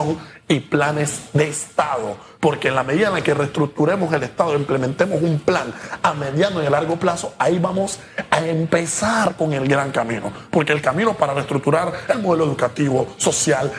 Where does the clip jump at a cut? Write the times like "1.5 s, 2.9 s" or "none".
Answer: none